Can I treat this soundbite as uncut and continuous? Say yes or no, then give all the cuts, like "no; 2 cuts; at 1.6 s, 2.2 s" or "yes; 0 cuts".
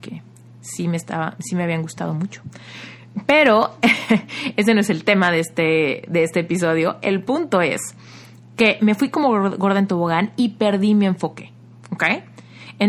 yes; 0 cuts